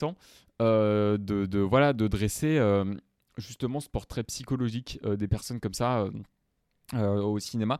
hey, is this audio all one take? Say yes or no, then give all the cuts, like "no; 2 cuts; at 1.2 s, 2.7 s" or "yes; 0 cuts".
yes; 0 cuts